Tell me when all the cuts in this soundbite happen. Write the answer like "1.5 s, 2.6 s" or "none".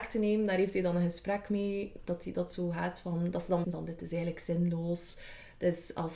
3.6 s